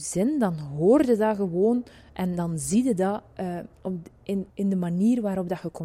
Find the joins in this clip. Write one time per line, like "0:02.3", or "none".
0:03.7
0:04.5